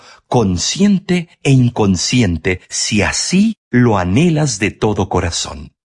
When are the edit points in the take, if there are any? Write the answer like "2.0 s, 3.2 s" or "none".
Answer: 1.3 s, 2.6 s